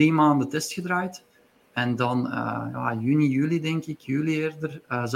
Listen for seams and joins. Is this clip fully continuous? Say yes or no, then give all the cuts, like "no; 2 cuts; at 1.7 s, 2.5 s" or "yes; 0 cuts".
yes; 0 cuts